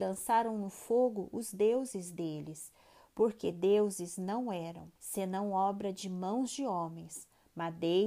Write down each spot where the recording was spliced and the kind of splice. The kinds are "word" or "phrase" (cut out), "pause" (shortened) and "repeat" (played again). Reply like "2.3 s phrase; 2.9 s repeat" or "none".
5.0 s pause